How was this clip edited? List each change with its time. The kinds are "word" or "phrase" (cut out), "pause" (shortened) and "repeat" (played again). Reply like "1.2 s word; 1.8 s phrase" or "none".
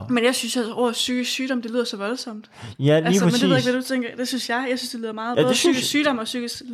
none